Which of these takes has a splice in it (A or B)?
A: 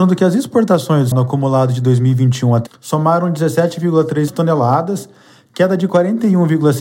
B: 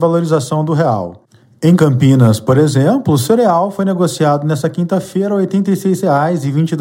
A